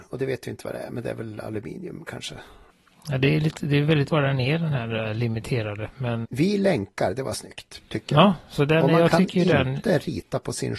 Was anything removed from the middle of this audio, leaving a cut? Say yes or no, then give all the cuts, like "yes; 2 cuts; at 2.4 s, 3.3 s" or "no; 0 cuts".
yes; 2 cuts; at 4.1 s, 6.2 s